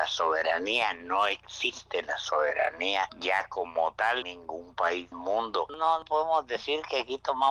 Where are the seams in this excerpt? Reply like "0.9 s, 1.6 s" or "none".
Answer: 4.2 s, 5.1 s